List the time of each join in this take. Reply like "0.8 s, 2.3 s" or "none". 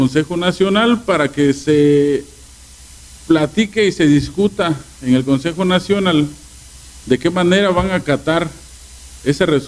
none